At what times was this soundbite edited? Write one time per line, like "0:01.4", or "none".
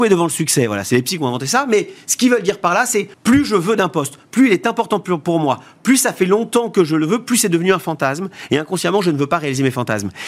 0:03.1